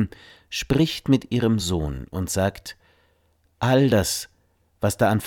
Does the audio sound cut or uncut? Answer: uncut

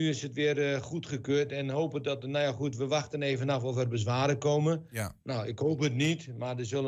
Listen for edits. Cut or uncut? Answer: uncut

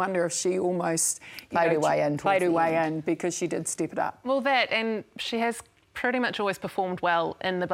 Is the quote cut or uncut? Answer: uncut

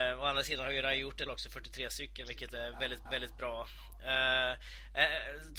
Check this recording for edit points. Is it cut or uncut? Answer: cut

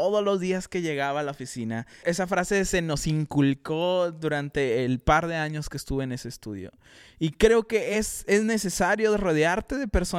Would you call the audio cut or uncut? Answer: uncut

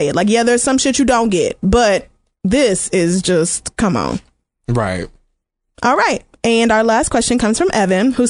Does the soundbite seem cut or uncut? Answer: uncut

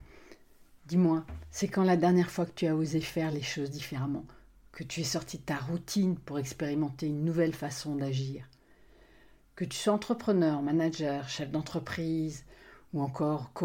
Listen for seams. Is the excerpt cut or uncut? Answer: uncut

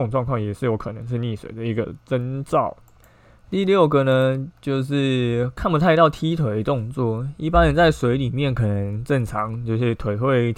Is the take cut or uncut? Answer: uncut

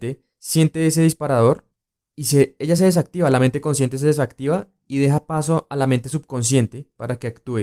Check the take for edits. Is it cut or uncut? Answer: uncut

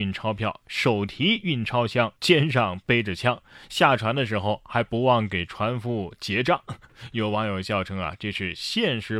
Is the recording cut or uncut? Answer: cut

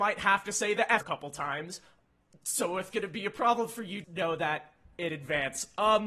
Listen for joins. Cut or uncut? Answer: cut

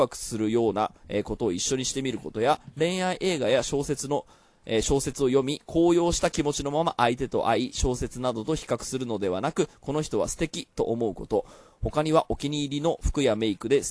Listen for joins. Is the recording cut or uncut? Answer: uncut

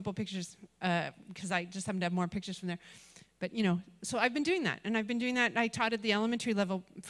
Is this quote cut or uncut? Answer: uncut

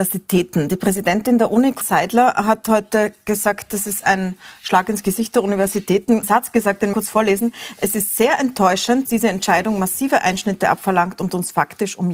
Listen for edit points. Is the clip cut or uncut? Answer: cut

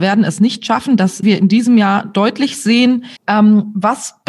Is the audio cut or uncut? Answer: cut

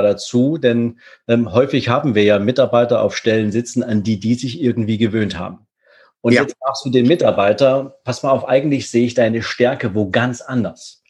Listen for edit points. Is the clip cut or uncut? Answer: uncut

